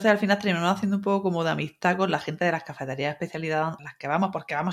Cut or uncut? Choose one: cut